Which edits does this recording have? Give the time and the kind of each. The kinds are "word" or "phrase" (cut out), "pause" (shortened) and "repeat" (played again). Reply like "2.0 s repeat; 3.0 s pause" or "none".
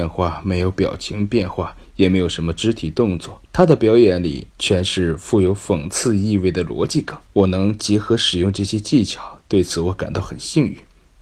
3.5 s pause; 4.5 s pause; 7.3 s pause